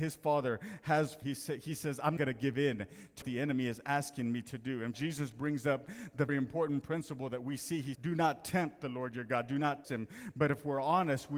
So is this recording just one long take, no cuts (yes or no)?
no